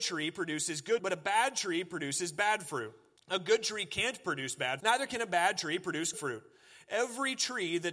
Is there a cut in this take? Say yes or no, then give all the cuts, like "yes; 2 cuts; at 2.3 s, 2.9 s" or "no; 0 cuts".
yes; 4 cuts; at 1.0 s, 3.2 s, 4.8 s, 6.1 s